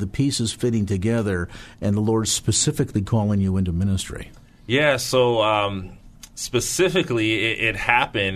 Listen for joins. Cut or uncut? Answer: uncut